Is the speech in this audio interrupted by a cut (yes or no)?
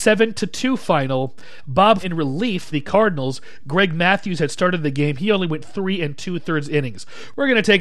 yes